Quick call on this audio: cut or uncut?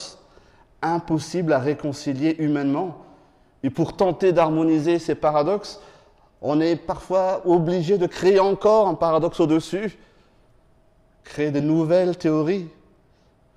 uncut